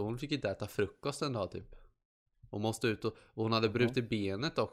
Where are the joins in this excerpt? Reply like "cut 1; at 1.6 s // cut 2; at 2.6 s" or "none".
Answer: cut 1; at 2.5 s